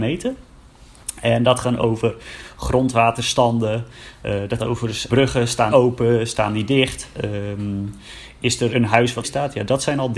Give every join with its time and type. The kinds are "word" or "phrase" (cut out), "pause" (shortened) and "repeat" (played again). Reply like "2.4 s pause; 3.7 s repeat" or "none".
1.6 s word; 4.6 s word; 5.1 s word; 5.7 s word; 8.7 s word; 9.2 s word